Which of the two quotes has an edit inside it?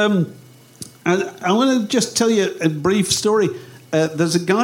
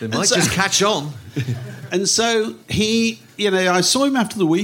second; 1 cut; at 2.6 s

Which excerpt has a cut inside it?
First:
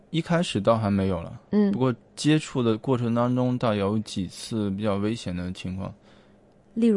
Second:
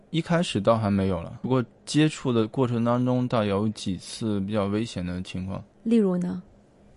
second; 2 cuts; at 1.4 s, 5.7 s

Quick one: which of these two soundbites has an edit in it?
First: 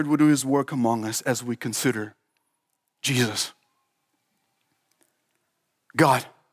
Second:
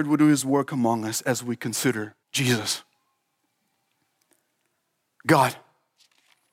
second; 1 cut; at 2.2 s

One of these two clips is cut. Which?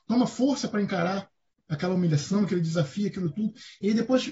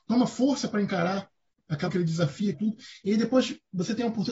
second; 2 cuts; at 1.9 s, 2.5 s

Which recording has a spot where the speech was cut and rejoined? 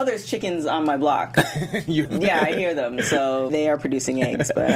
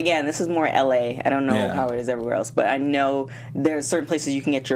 first; 2 cuts; at 2.1 s, 3.5 s

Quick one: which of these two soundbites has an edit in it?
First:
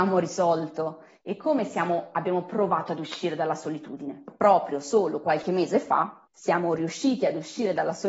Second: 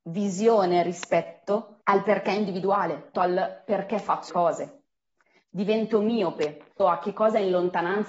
second; 3 cuts; at 3.1 s, 4.3 s, 6.8 s

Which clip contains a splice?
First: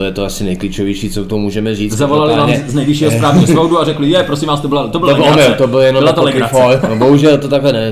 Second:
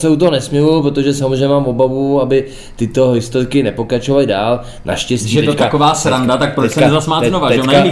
first; 1 cut; at 6.8 s

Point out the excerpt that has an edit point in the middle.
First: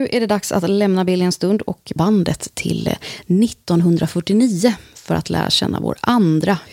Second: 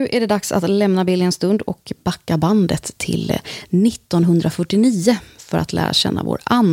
first; 1 cut; at 2.0 s

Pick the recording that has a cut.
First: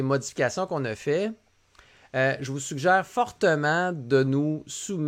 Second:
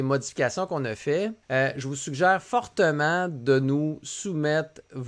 second; 1 cut; at 1.4 s

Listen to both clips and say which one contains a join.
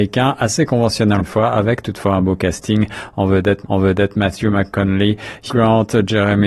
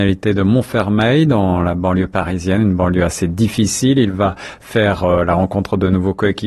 first; 3 cuts; at 1.2 s, 3.6 s, 5.5 s

